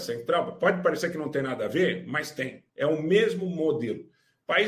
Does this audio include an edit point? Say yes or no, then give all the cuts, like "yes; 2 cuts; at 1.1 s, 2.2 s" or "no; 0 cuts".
yes; 1 cut; at 2.7 s